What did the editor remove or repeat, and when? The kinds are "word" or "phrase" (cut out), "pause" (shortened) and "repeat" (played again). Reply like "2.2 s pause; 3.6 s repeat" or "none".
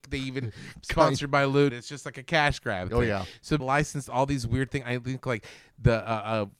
1.7 s phrase; 3.6 s word